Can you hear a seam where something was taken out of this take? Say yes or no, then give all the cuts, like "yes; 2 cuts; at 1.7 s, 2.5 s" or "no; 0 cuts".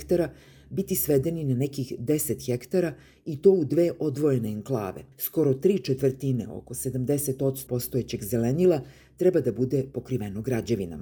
yes; 2 cuts; at 5.1 s, 7.7 s